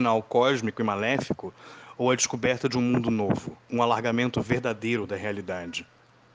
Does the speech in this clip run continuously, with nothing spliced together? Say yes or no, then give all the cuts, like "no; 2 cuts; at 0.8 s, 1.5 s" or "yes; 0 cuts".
no; 1 cut; at 3.6 s